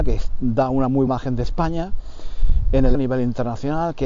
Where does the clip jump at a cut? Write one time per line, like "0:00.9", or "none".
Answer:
0:01.1
0:02.9